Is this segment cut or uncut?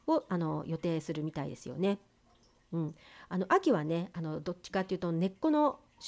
uncut